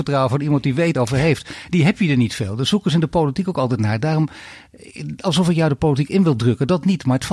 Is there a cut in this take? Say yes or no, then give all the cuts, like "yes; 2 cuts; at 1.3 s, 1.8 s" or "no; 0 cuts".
yes; 1 cut; at 0.9 s